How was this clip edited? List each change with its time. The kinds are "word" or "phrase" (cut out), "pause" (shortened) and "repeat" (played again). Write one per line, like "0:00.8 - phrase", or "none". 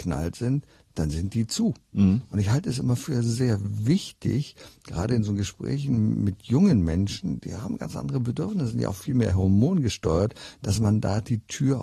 none

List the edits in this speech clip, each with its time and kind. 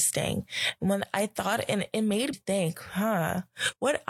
0:02.3 - word
0:02.7 - word

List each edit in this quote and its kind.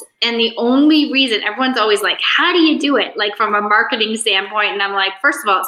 none

